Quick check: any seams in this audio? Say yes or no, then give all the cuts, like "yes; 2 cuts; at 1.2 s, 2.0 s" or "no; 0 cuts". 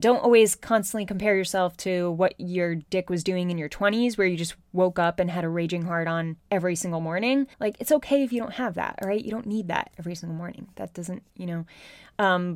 yes; 3 cuts; at 6.4 s, 7.5 s, 11.3 s